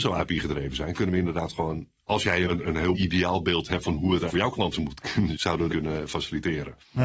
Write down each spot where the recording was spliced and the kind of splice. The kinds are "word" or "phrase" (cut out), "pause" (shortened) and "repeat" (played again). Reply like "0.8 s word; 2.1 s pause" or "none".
2.5 s word; 2.9 s word; 4.3 s word; 4.7 s word; 5.3 s word; 5.7 s word